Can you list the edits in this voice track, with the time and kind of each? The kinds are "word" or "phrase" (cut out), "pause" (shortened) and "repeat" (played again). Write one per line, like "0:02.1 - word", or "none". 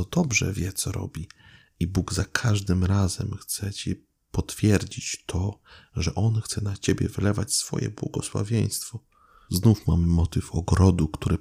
none